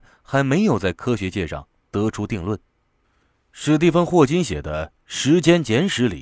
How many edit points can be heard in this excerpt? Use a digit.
0